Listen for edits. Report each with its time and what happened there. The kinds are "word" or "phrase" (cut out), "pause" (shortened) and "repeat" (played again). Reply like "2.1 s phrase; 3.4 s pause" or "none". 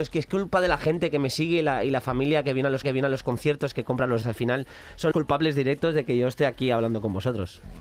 2.8 s repeat; 4.2 s word; 5.1 s word